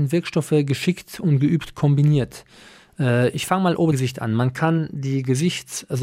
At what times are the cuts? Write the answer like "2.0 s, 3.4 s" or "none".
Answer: 3.9 s

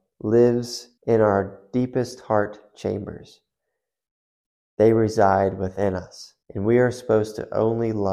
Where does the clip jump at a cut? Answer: 1.0 s, 6.4 s

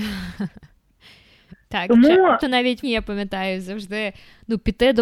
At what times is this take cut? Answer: 2.4 s, 2.8 s

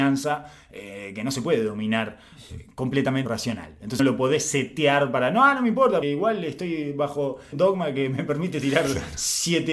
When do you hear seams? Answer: 3.3 s, 4.0 s, 6.0 s, 7.5 s

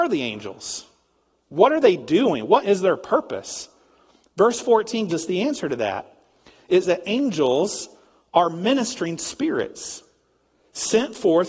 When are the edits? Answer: 2.6 s, 5.1 s, 6.8 s

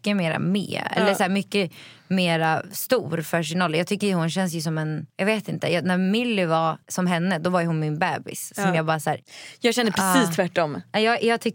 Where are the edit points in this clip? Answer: 5.1 s, 6.8 s

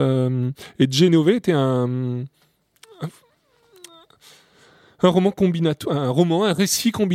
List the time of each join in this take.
none

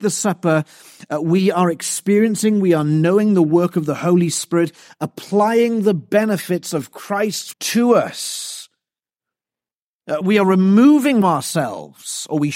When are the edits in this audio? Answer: 7.5 s, 10.2 s, 11.2 s

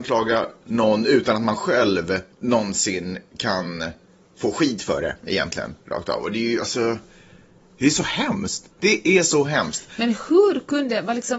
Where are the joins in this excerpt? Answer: 2.3 s, 8.7 s

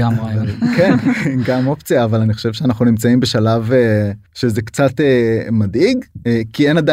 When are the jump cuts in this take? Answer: 4.3 s

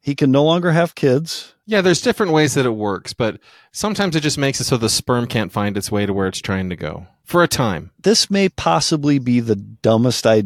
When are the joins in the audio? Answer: none

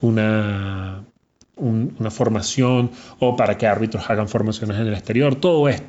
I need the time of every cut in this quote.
none

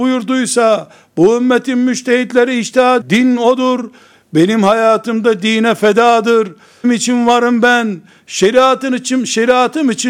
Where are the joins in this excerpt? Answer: 3.0 s, 6.8 s

